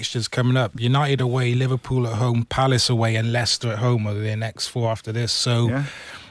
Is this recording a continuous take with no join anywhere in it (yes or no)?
yes